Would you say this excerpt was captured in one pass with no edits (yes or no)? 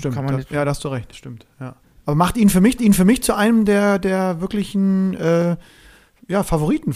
no